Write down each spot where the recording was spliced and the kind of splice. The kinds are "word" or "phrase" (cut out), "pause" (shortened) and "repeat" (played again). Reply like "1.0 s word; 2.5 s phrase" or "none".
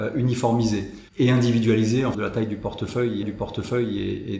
1.1 s pause; 2.1 s phrase; 3.2 s repeat